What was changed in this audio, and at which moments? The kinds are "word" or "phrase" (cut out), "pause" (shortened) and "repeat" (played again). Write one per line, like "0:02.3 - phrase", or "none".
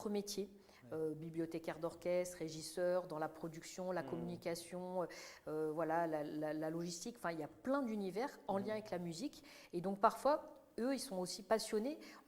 none